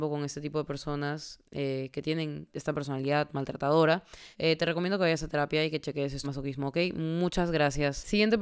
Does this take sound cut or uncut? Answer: cut